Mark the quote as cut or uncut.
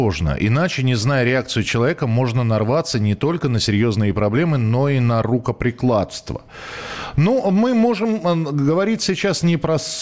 uncut